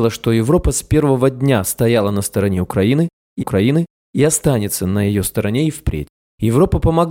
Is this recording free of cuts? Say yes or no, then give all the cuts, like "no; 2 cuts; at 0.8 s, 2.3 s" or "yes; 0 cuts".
no; 1 cut; at 3.4 s